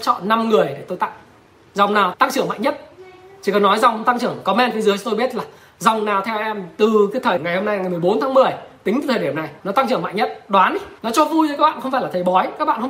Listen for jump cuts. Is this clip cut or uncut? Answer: cut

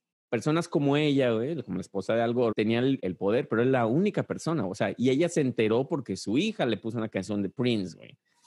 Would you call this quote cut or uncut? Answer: cut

